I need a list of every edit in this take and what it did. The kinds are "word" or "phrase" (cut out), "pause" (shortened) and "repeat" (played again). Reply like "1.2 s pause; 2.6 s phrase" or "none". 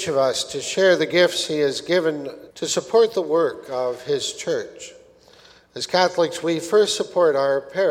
2.5 s pause